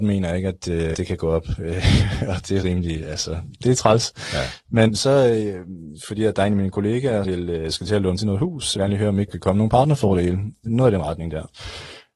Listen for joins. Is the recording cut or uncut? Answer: cut